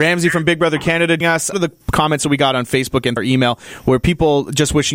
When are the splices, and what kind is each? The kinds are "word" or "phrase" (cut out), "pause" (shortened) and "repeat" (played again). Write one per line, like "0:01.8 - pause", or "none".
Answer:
0:01.2 - word
0:01.5 - word
0:03.2 - word

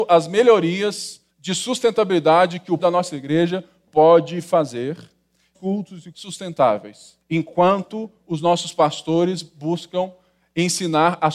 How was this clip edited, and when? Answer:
0:01.3 - pause
0:02.8 - word
0:05.5 - phrase
0:06.1 - phrase
0:07.2 - pause

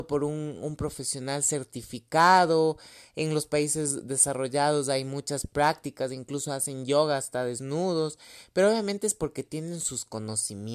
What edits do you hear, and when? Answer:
none

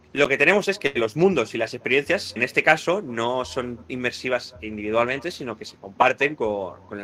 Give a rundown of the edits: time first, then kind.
0:02.4 - word

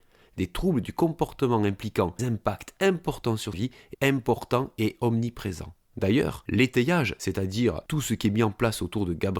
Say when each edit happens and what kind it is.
0:02.2 - word
0:03.5 - word
0:03.9 - phrase

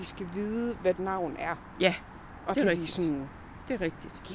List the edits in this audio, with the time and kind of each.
0:01.0 - word
0:02.5 - word

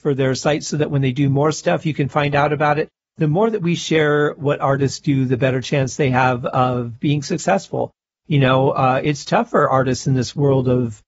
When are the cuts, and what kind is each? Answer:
none

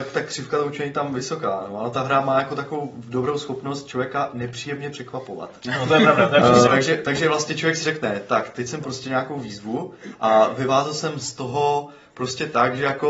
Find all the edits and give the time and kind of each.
0:06.7 - word
0:08.8 - word

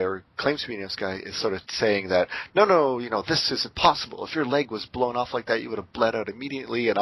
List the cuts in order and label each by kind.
none

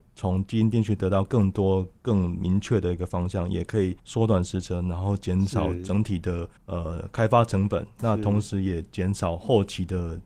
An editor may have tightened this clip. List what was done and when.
0:04.0 - pause
0:06.6 - pause

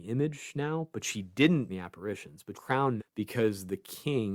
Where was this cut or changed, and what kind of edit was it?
0:01.7 - word
0:02.5 - word
0:03.0 - word

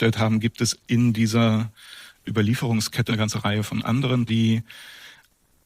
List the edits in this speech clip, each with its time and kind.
0:03.1 - word
0:04.3 - word

